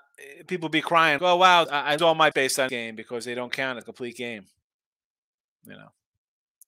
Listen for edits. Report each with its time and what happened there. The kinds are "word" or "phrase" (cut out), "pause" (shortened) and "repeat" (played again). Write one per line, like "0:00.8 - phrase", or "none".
0:01.2 - word
0:01.7 - word
0:02.0 - word
0:02.3 - word
0:02.7 - word
0:03.8 - word